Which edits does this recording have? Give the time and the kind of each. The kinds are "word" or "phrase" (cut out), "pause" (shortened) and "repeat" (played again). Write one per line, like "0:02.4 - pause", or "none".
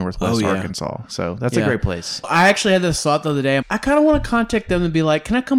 0:02.2 - word
0:03.6 - word

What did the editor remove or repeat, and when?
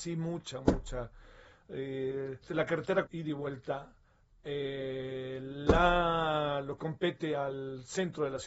0:02.4 - word
0:03.1 - word
0:06.8 - word

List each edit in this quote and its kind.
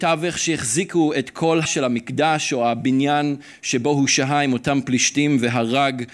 0:01.7 - word

